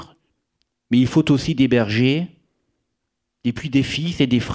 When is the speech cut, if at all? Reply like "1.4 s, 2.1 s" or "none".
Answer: none